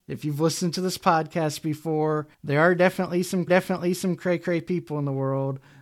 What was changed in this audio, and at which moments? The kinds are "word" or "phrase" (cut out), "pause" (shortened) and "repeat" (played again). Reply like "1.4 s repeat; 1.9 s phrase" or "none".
2.3 s pause; 3.5 s repeat